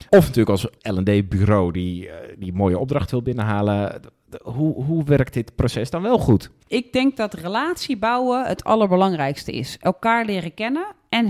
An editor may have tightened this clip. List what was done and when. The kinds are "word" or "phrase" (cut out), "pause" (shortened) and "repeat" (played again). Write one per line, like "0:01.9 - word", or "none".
0:06.6 - pause